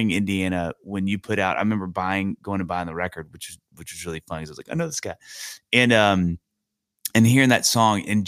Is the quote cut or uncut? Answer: uncut